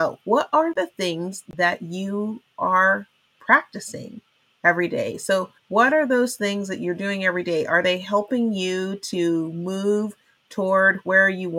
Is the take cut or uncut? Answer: cut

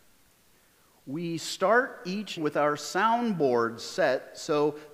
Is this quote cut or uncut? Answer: cut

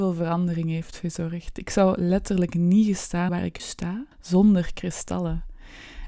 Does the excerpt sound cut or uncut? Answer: cut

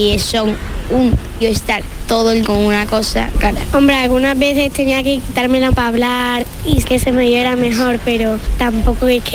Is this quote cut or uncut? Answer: cut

